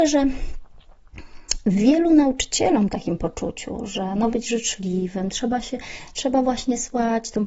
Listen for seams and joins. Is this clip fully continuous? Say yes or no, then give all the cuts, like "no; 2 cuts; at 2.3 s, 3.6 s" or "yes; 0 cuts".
no; 2 cuts; at 2.9 s, 4.3 s